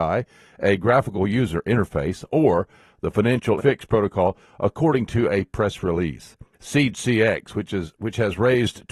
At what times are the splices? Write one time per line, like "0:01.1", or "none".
0:03.6
0:06.5